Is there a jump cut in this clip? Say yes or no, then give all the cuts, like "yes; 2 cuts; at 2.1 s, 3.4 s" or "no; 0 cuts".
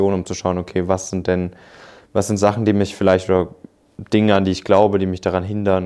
no; 0 cuts